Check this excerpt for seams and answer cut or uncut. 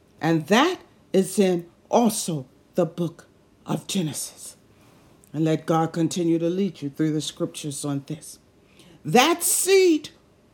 uncut